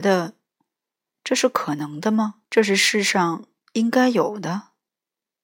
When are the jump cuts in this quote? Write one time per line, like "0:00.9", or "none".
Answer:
0:02.4